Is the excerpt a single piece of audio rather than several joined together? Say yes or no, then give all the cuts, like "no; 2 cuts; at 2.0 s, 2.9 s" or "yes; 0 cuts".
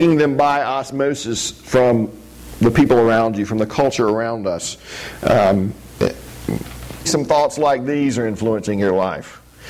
no; 1 cut; at 7.0 s